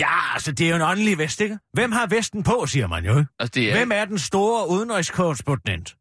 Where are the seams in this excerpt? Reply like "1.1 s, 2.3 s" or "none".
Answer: 1.6 s, 3.3 s